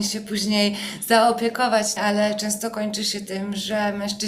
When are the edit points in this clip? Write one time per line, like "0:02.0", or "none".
0:02.0